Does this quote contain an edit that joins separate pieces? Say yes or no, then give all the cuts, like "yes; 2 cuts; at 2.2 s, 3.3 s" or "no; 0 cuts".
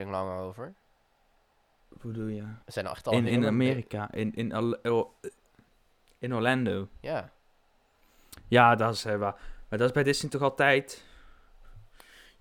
yes; 1 cut; at 2.6 s